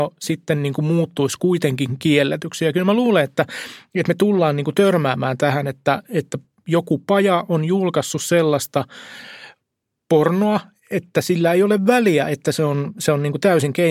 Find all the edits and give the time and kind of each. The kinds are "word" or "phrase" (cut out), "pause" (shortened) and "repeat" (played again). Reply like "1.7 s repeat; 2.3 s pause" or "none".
none

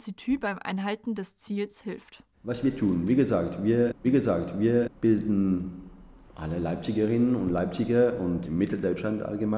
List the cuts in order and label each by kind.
2.3 s pause; 4.0 s repeat; 8.4 s word

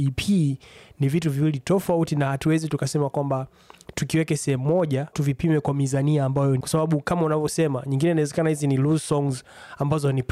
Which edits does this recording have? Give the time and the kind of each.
5.1 s word; 6.6 s word

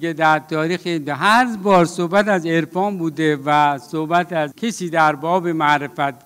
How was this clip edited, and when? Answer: 4.5 s phrase

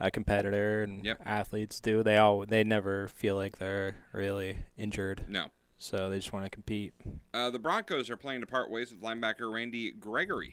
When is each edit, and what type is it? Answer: none

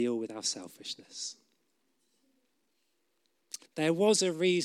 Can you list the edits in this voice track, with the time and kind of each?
3.7 s pause

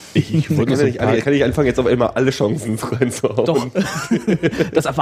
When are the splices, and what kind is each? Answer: none

